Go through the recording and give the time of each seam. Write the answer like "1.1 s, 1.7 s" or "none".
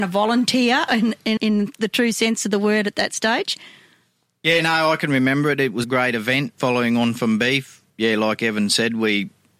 1.4 s, 5.8 s, 7.9 s